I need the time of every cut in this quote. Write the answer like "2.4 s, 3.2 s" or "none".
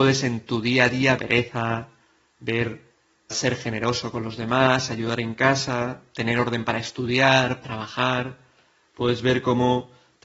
1.2 s, 3.3 s, 7.6 s